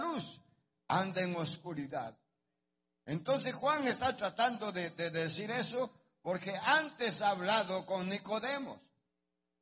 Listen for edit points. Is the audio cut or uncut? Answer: uncut